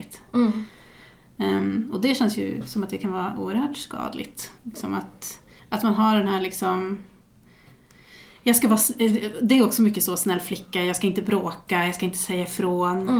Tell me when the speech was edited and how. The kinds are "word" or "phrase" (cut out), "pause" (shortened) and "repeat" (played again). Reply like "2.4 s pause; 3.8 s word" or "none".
4.6 s pause; 5.6 s pause

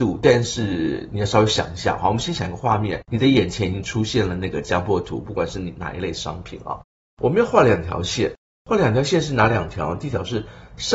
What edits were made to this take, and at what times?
none

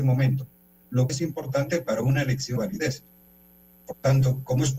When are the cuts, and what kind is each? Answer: 1.1 s word; 2.6 s word

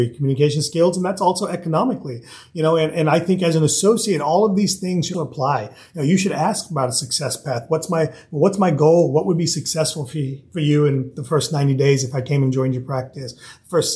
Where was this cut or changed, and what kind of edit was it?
5.1 s word

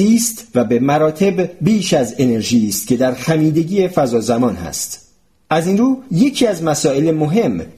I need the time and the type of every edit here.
none

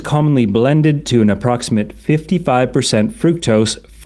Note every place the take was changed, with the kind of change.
none

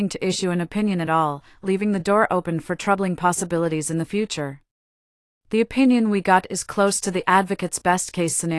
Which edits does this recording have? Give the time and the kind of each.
none

